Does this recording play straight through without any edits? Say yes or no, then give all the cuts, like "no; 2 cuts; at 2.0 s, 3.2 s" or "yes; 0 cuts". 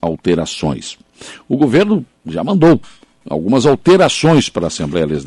yes; 0 cuts